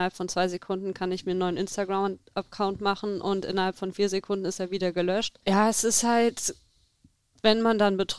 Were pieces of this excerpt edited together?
yes; 1 cut; at 5.4 s

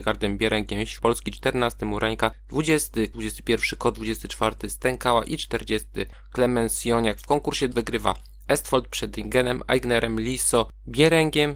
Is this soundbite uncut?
no; 3 cuts; at 1.0 s, 3.1 s, 7.7 s

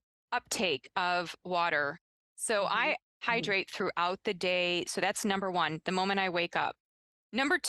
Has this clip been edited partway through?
no; 0 cuts

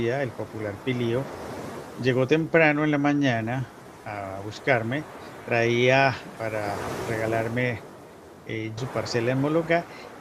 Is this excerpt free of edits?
no; 2 cuts; at 6.4 s, 8.8 s

